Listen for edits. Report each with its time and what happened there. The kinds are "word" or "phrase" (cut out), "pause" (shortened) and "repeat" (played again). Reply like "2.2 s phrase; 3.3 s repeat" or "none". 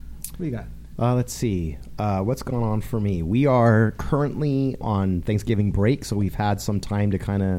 4.8 s word